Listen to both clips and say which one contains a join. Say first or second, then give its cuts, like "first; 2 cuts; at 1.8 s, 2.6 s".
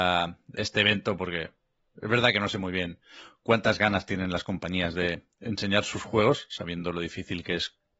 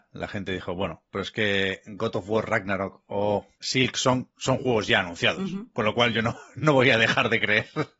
second; 1 cut; at 3.6 s